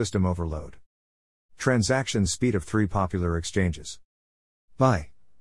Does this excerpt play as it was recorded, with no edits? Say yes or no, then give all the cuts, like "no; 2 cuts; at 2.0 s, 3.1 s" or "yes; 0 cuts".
yes; 0 cuts